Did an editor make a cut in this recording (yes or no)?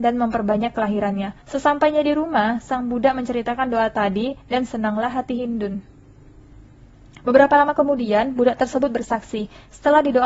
yes